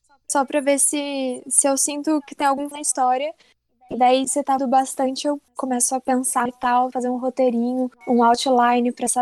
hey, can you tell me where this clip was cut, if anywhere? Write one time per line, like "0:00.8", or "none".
0:02.7
0:04.2
0:04.6
0:06.5
0:06.9

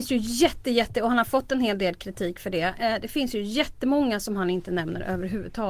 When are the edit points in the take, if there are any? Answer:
none

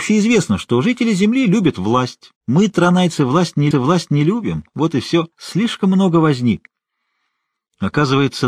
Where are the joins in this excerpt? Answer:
0:02.4
0:03.7
0:05.3

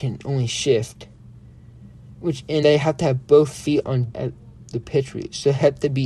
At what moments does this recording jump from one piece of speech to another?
0:02.6
0:04.1

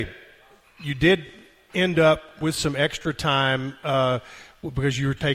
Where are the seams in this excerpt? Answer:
none

